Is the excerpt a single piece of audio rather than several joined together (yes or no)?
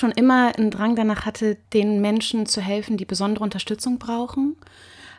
no